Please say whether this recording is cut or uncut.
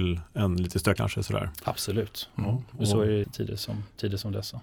cut